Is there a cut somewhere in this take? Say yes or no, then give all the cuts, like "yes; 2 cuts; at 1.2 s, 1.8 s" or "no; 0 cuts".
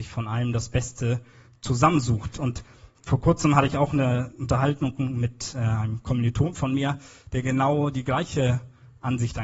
no; 0 cuts